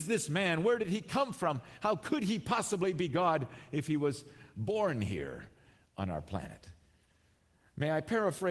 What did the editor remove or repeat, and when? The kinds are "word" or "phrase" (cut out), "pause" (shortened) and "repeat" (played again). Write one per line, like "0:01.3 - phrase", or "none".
none